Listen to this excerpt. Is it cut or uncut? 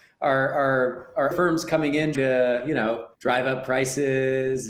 cut